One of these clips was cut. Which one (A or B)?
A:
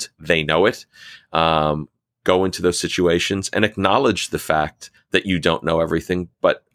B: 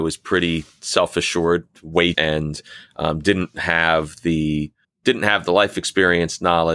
B